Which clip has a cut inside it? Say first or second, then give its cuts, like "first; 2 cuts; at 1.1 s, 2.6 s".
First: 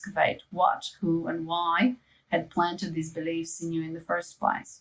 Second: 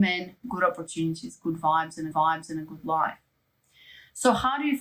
second; 1 cut; at 2.1 s